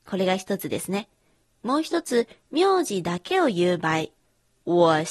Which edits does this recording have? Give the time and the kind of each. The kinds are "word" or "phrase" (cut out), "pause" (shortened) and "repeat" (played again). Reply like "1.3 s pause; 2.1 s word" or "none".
none